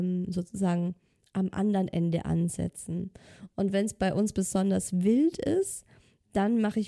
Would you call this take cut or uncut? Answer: uncut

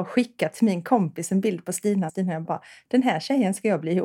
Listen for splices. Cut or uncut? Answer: cut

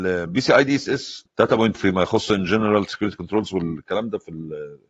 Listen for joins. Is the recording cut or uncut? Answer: cut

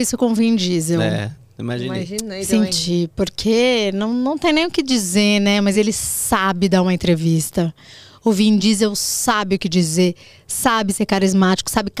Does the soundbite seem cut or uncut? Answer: uncut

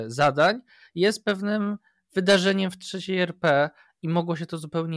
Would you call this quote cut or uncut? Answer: uncut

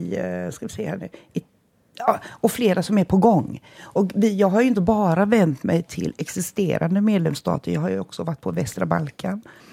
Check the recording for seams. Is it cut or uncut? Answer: uncut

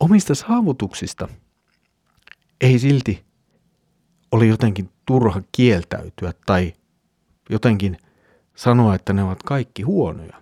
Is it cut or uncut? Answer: uncut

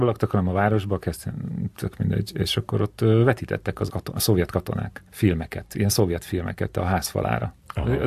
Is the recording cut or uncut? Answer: cut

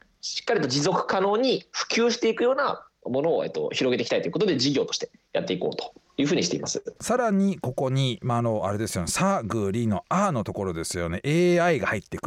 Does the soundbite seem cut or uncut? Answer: cut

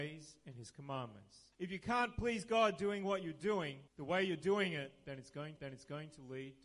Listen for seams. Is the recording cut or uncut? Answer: cut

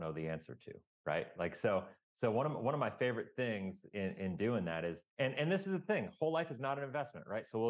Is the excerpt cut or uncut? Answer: cut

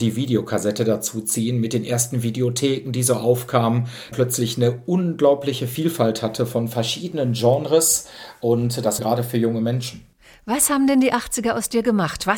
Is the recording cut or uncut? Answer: cut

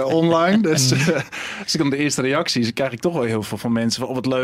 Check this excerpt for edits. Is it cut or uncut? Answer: uncut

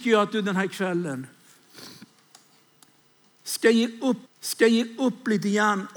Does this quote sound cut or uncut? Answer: cut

